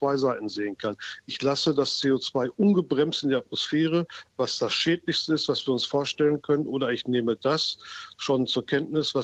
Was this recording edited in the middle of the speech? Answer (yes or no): no